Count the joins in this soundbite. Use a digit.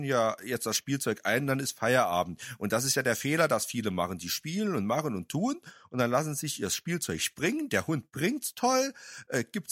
0